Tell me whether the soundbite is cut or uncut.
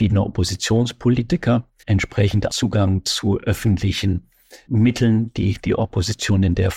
cut